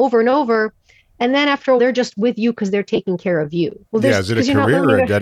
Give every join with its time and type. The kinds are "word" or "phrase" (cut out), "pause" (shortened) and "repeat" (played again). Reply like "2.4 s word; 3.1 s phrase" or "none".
1.8 s word; 3.9 s pause